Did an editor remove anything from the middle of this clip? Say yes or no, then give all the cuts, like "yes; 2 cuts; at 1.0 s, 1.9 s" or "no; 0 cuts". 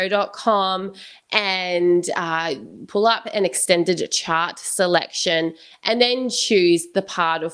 no; 0 cuts